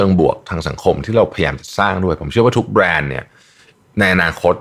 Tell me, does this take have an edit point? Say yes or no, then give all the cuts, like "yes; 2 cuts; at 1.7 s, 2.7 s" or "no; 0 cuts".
no; 0 cuts